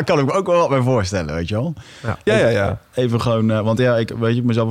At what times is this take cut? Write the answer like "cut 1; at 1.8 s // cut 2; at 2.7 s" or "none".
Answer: none